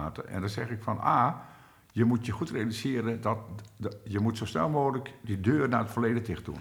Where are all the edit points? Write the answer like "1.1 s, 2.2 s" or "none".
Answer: none